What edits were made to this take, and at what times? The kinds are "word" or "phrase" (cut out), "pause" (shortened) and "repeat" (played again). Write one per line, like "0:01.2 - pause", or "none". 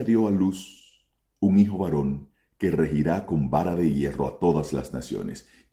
none